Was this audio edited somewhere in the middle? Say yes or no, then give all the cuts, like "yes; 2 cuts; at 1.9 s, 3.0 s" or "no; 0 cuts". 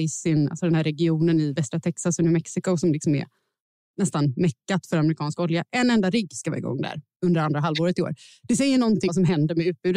yes; 1 cut; at 9.1 s